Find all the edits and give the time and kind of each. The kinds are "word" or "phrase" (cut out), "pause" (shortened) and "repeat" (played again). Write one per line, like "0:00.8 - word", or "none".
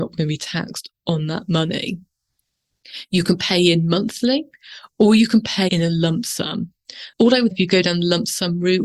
0:05.7 - word
0:07.1 - pause
0:07.5 - word